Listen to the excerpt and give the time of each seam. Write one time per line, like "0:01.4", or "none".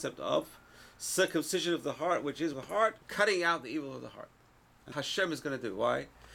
0:02.5
0:03.0
0:04.9